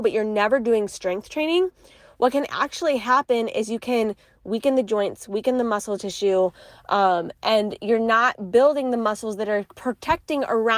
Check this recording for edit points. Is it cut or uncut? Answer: uncut